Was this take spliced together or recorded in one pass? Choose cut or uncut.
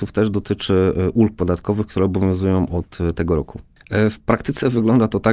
uncut